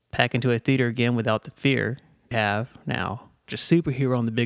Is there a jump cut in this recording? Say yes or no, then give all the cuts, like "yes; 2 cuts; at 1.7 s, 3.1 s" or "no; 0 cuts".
yes; 2 cuts; at 2.3 s, 3.5 s